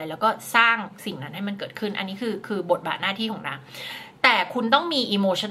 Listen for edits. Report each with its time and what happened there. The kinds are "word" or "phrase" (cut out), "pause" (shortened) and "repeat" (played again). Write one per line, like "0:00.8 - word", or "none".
none